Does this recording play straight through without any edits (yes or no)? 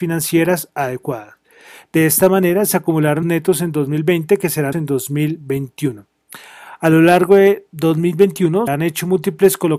no